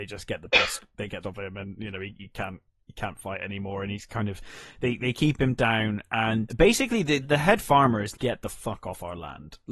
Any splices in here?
yes; 4 cuts; at 1.2 s, 6.5 s, 7.2 s, 8.1 s

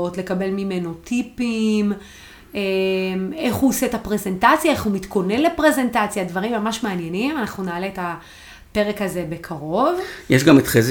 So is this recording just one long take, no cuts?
yes; 0 cuts

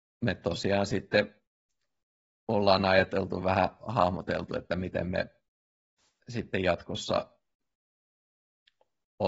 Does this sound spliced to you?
no; 0 cuts

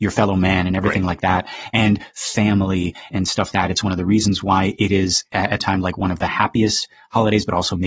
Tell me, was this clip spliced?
yes; 4 cuts; at 3.1 s, 3.5 s, 4.8 s, 5.6 s

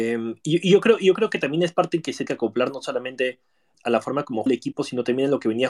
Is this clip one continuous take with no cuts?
no; 3 cuts; at 2.3 s, 3.7 s, 4.5 s

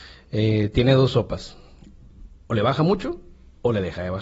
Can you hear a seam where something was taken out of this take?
no; 0 cuts

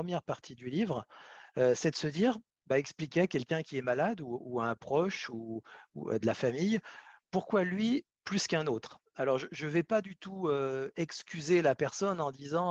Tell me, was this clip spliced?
no; 0 cuts

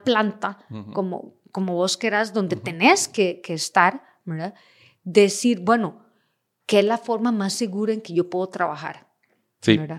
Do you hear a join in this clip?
no; 0 cuts

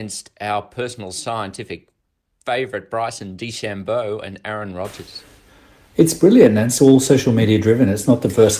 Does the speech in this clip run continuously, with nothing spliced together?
yes; 0 cuts

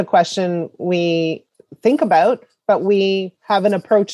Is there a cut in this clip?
no; 0 cuts

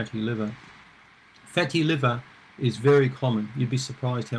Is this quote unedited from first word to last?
yes; 0 cuts

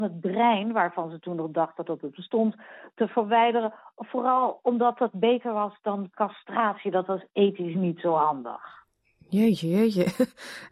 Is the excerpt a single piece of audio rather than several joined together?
yes; 0 cuts

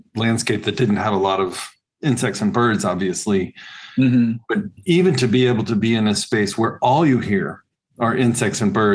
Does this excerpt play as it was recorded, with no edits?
yes; 0 cuts

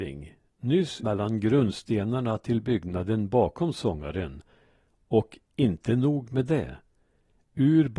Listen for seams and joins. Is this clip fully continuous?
no; 1 cut; at 1.0 s

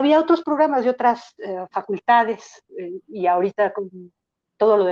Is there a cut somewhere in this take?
no; 0 cuts

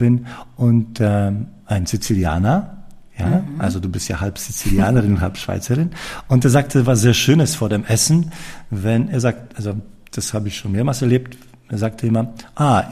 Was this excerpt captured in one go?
yes; 0 cuts

